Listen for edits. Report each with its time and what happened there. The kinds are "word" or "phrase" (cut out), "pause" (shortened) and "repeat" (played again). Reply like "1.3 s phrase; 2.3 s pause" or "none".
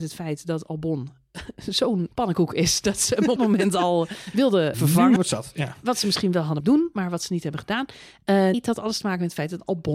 2.1 s word; 3.4 s word; 4.7 s word; 5.2 s word; 6.6 s word; 8.5 s word